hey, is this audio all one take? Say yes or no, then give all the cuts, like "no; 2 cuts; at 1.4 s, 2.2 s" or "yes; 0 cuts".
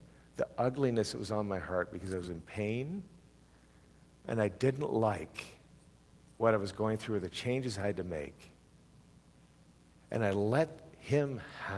yes; 0 cuts